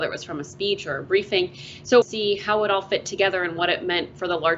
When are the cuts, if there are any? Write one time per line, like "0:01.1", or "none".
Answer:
0:02.0